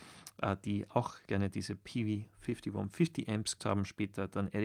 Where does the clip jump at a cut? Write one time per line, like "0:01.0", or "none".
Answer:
0:01.3
0:03.6